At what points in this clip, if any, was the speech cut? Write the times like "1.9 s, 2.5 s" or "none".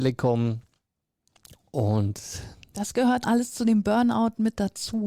3.2 s